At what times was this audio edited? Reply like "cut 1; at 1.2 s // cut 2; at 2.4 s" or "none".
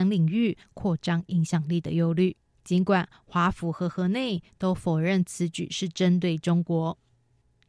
cut 1; at 2.5 s